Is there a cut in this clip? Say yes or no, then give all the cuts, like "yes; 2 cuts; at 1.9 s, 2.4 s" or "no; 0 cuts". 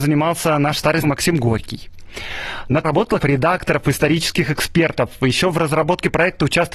yes; 3 cuts; at 1.0 s, 2.8 s, 3.2 s